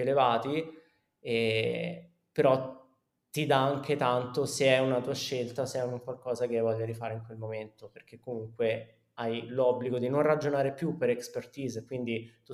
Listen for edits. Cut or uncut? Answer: uncut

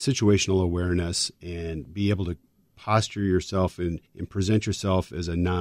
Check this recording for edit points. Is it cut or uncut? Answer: cut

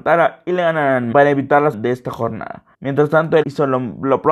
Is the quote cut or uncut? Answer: cut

